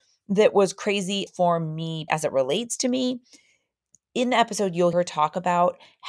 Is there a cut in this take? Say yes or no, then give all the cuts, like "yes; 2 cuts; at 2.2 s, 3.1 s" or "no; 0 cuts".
yes; 4 cuts; at 1.3 s, 2.1 s, 4.1 s, 4.9 s